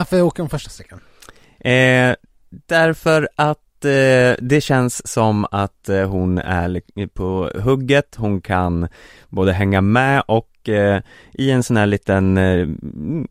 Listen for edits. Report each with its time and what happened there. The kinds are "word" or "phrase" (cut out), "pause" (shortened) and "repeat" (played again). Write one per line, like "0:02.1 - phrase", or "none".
none